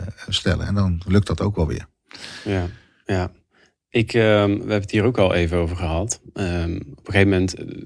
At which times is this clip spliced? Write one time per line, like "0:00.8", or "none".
none